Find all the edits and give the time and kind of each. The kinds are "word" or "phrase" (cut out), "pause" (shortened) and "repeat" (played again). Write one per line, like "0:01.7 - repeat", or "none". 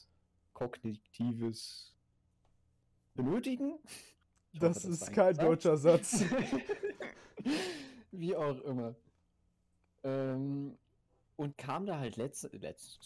0:03.2 - word
0:11.5 - word